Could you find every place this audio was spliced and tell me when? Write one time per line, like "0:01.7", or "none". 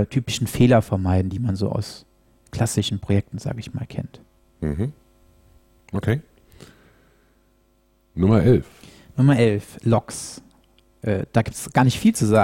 none